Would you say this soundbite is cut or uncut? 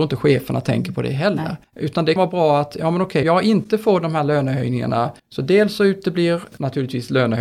cut